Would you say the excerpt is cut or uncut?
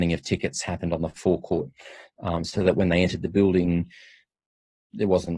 uncut